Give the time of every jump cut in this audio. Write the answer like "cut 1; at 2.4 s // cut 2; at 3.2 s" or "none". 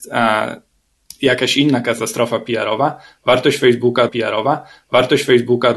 cut 1; at 4.1 s